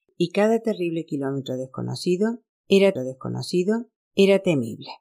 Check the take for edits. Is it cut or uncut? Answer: cut